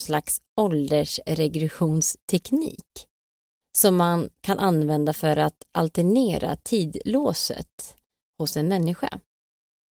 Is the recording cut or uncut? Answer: uncut